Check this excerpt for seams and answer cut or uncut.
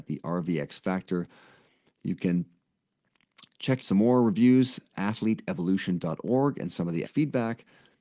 cut